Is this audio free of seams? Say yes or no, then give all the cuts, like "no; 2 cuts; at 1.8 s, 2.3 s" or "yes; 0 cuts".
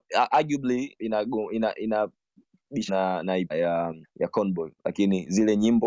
no; 4 cuts; at 1.0 s, 2.9 s, 3.5 s, 4.0 s